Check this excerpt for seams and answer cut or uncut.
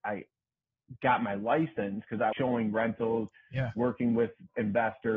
cut